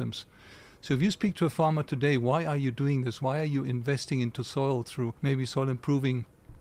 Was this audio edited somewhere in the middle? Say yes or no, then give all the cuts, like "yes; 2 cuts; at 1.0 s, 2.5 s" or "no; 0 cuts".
yes; 1 cut; at 5.2 s